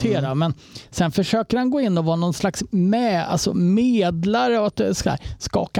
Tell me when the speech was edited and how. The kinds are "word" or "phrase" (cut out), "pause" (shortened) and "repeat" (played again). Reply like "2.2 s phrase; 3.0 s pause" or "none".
none